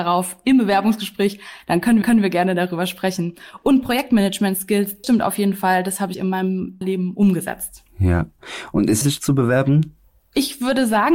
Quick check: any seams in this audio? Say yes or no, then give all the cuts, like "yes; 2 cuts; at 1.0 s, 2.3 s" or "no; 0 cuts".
yes; 6 cuts; at 2.0 s, 5.0 s, 6.1 s, 6.8 s, 9.0 s, 10.0 s